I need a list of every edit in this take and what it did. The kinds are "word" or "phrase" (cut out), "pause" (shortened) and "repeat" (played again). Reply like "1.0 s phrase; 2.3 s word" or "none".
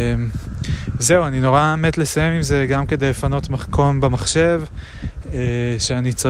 none